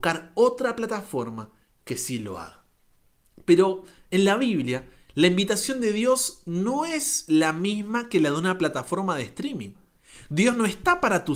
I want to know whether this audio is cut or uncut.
uncut